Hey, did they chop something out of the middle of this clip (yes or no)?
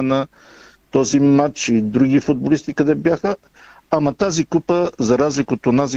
no